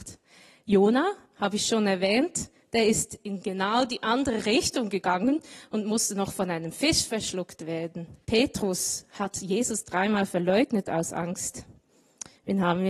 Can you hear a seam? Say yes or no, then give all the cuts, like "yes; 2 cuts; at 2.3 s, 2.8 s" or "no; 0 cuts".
yes; 2 cuts; at 1.2 s, 8.2 s